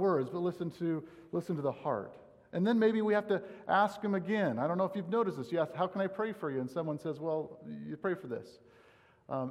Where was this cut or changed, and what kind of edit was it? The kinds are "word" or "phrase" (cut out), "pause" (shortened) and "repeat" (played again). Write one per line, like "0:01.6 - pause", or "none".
none